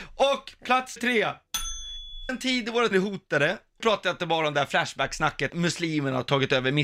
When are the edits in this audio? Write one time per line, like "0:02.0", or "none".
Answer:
0:01.0
0:02.3
0:02.9
0:03.8
0:05.5